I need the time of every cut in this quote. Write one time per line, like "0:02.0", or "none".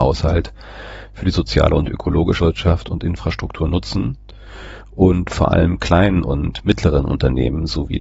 0:02.4